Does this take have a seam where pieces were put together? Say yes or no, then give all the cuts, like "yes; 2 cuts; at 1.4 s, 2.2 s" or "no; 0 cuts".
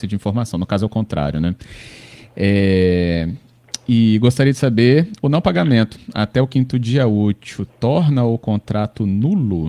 no; 0 cuts